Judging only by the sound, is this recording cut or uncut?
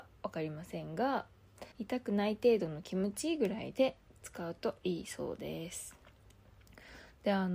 cut